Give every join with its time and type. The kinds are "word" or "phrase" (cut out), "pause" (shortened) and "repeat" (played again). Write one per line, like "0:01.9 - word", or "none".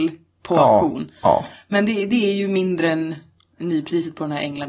none